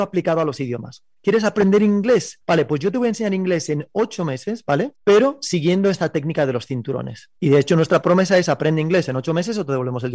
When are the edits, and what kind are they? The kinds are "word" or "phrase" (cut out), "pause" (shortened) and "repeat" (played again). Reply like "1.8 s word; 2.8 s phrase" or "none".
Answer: 2.4 s pause; 5.0 s pause; 7.4 s pause